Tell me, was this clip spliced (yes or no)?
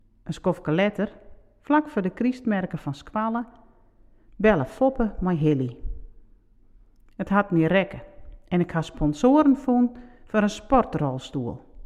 no